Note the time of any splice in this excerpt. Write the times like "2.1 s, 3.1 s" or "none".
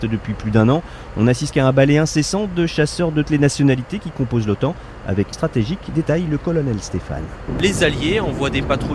1.5 s, 3.2 s, 5.3 s